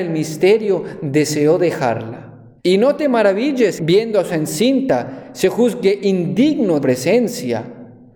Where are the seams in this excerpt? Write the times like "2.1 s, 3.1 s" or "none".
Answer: 2.6 s, 3.8 s, 4.3 s, 6.8 s